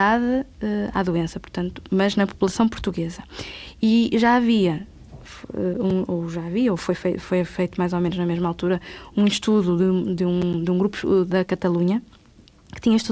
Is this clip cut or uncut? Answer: uncut